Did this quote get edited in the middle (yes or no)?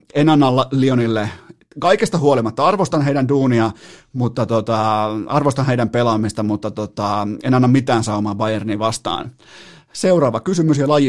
no